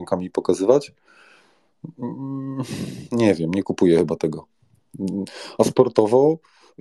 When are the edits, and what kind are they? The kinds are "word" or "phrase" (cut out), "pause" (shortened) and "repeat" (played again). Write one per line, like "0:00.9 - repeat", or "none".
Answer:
none